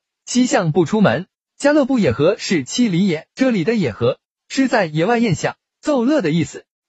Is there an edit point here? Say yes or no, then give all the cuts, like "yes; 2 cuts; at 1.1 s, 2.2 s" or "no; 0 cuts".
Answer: yes; 1 cut; at 3.3 s